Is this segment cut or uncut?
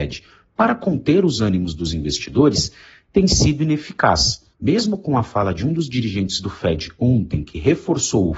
uncut